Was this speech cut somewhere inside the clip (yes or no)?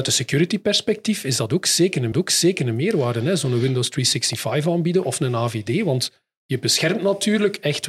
yes